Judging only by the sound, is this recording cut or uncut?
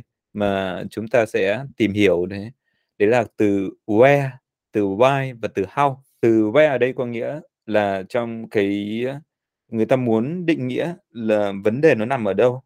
uncut